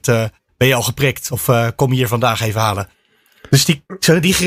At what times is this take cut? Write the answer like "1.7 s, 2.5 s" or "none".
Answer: none